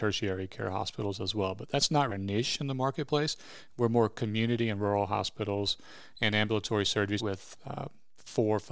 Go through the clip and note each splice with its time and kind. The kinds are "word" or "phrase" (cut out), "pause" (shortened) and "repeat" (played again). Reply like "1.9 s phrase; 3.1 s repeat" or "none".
2.1 s word; 7.2 s word